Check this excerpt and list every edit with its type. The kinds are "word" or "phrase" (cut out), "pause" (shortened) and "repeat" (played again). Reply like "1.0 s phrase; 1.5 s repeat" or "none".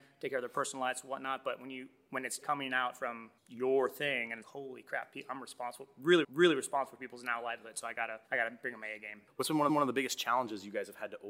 2.4 s word; 3.4 s pause; 4.4 s phrase; 6.2 s repeat; 8.3 s pause; 9.7 s repeat